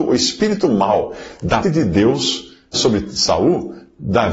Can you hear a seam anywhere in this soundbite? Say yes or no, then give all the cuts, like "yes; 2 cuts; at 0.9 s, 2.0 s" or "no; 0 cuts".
yes; 2 cuts; at 1.6 s, 2.7 s